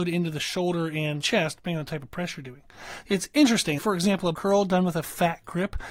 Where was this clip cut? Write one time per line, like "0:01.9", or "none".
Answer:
0:01.2
0:03.0
0:03.8
0:04.3